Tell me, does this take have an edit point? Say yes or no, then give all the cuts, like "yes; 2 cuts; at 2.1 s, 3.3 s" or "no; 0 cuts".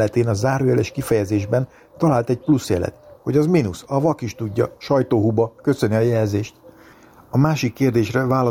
no; 0 cuts